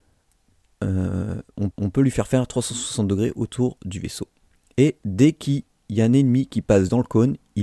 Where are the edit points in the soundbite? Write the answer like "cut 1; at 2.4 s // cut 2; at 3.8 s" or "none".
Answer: cut 1; at 1.7 s